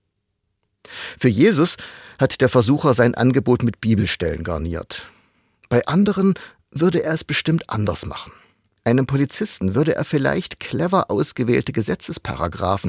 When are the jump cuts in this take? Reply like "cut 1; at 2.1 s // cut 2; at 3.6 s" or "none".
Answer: none